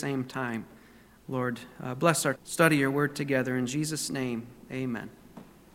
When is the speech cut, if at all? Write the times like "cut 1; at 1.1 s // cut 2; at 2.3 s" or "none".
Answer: cut 1; at 2.4 s